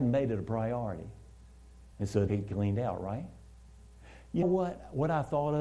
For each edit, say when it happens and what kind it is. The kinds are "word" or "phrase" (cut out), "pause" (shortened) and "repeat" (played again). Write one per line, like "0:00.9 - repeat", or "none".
0:01.9 - pause
0:02.3 - word
0:04.4 - word